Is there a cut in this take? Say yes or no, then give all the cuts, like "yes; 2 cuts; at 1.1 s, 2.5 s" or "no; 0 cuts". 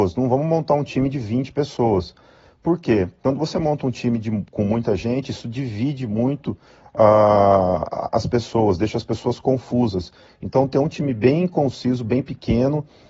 no; 0 cuts